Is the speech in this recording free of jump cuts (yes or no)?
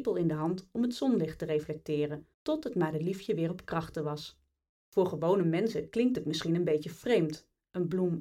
no